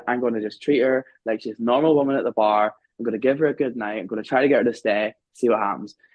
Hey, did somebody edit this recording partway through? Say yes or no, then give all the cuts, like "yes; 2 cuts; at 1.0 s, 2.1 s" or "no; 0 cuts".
no; 0 cuts